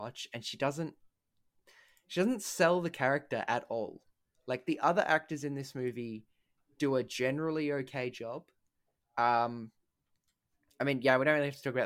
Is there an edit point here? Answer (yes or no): no